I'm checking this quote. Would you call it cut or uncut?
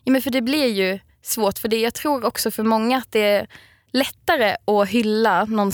uncut